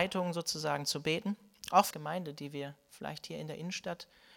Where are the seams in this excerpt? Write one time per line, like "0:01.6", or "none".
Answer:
0:01.9